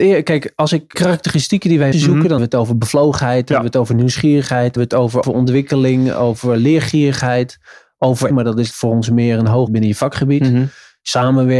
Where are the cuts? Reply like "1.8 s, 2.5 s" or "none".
0.9 s, 1.9 s, 2.4 s, 4.8 s, 5.2 s, 8.3 s, 8.7 s, 9.7 s